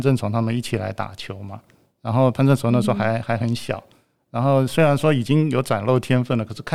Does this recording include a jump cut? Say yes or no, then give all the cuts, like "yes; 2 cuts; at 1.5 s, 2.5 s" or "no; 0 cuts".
no; 0 cuts